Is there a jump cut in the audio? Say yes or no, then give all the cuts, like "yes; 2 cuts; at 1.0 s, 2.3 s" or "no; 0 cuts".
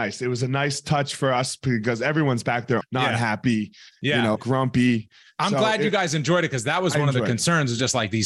yes; 2 cuts; at 2.8 s, 4.4 s